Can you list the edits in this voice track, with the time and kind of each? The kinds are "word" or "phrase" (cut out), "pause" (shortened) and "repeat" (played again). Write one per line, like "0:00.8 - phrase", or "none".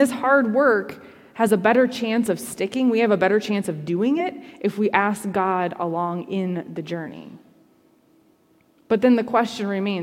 none